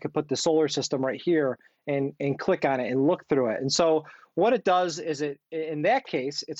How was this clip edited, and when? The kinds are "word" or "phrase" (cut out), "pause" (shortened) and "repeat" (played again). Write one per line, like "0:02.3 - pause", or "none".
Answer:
none

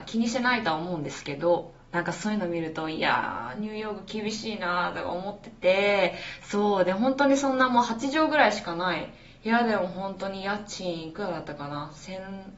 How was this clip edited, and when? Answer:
none

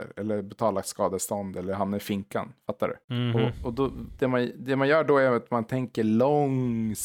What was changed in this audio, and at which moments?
0:03.0 - pause

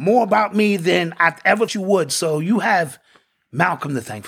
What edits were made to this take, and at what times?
0:01.7 - word

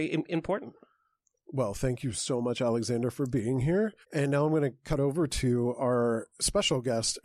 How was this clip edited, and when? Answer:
0:04.0 - pause
0:06.3 - pause

